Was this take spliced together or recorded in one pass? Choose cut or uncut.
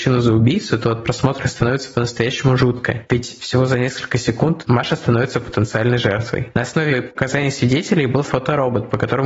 cut